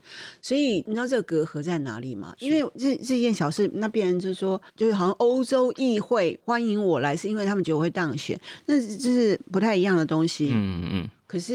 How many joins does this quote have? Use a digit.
1